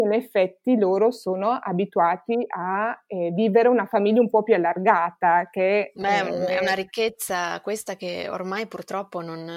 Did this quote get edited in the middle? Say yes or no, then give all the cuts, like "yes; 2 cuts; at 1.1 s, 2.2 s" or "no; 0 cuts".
no; 0 cuts